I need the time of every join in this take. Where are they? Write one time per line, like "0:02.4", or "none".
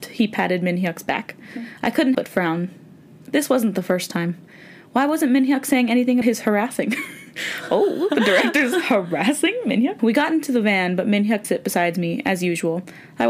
0:02.1
0:06.2
0:11.4